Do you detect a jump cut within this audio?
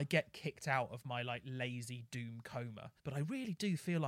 yes; 1 cut; at 3.0 s

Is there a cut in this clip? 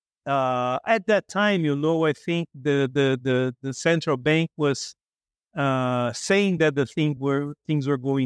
no; 0 cuts

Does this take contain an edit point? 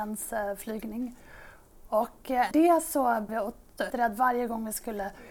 yes; 3 cuts; at 2.5 s, 3.3 s, 3.9 s

